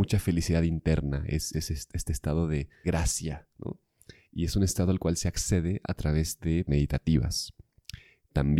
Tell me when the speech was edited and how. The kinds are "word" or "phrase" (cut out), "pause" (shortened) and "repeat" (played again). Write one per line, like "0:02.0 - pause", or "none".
0:01.5 - word
0:02.8 - word
0:06.7 - word